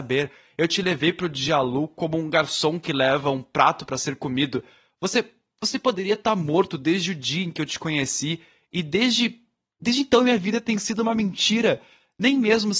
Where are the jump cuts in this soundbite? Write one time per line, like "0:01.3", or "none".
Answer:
none